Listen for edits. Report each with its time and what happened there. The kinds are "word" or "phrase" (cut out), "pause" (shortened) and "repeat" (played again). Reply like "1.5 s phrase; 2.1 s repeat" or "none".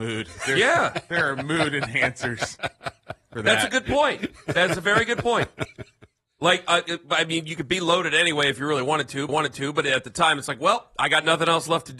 9.3 s repeat